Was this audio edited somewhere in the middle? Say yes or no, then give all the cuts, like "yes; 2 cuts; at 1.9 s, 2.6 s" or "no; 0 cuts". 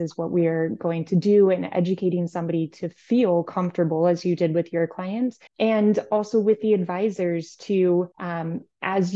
yes; 2 cuts; at 5.5 s, 8.1 s